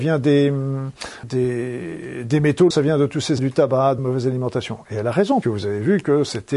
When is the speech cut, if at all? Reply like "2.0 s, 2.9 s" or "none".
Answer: 1.2 s, 2.7 s, 3.4 s, 4.0 s, 5.4 s